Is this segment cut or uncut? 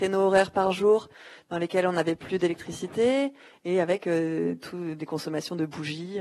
uncut